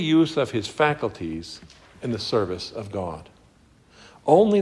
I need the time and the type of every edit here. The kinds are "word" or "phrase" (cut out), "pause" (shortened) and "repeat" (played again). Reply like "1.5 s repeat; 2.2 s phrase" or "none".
none